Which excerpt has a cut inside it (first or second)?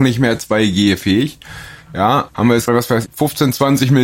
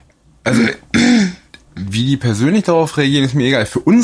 first